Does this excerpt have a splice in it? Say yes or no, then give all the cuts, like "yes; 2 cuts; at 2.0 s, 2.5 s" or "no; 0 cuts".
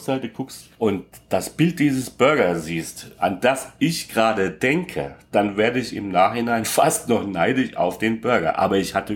no; 0 cuts